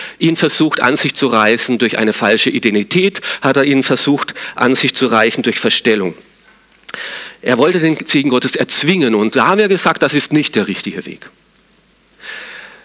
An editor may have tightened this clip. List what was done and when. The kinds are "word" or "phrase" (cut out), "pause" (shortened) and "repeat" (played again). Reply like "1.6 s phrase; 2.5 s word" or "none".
none